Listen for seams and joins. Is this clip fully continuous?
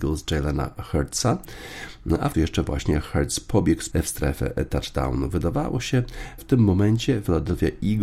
no; 3 cuts; at 2.3 s, 3.9 s, 6.4 s

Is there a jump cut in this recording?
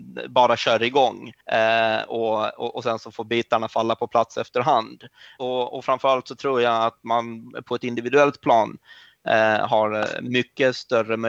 yes; 1 cut; at 1.4 s

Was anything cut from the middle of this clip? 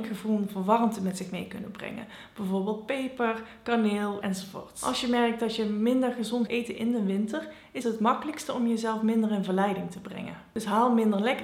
yes; 3 cuts; at 4.2 s, 6.5 s, 7.8 s

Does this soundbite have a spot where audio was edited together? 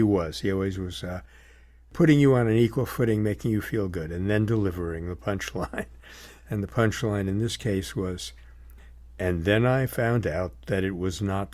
no; 0 cuts

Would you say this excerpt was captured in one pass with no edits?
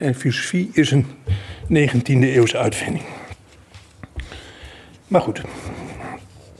yes; 0 cuts

